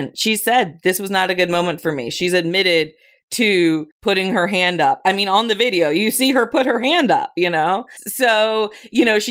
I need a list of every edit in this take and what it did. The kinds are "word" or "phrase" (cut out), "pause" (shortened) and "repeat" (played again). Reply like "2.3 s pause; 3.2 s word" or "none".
3.9 s pause